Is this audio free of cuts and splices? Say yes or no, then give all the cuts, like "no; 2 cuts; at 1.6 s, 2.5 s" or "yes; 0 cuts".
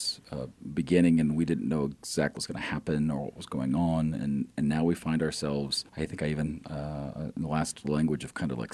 no; 3 cuts; at 2.4 s, 5.9 s, 7.8 s